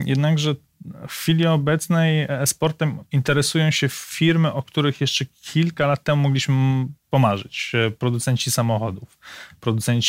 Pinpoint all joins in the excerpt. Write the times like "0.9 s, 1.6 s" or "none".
3.1 s, 7.0 s